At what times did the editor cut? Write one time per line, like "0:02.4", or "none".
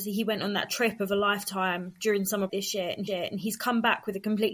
0:02.5
0:03.1